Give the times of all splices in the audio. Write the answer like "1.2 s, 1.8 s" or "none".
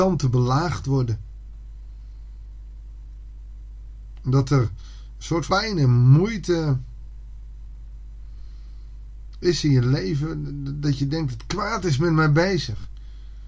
5.5 s